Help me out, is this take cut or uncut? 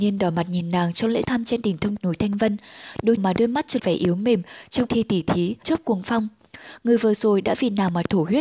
cut